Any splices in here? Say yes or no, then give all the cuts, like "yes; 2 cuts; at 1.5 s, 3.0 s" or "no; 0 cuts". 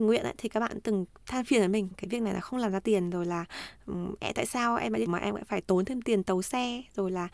yes; 2 cuts; at 1.9 s, 5.1 s